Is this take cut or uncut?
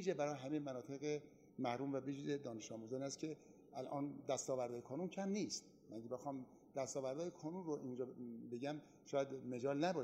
uncut